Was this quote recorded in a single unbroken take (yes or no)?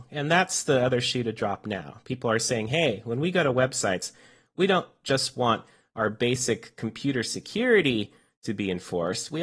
yes